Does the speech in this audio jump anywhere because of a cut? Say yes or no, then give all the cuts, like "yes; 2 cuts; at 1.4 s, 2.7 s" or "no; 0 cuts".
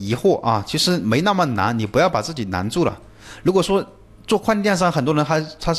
no; 0 cuts